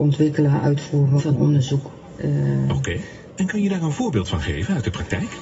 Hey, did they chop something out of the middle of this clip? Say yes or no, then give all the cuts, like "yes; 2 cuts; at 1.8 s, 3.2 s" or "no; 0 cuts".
no; 0 cuts